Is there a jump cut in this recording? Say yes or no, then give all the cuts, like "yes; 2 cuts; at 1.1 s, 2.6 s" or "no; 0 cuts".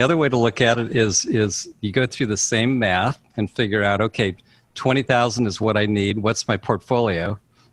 no; 0 cuts